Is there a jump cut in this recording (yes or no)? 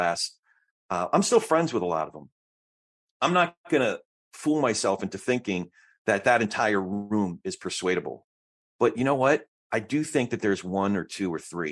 no